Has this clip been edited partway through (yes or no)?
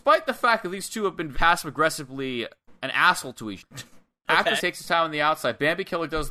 yes